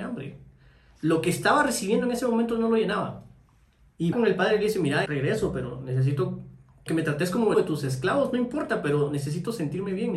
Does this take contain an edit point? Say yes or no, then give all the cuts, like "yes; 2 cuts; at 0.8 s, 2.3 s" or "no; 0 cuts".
yes; 4 cuts; at 4.1 s, 5.1 s, 6.9 s, 7.5 s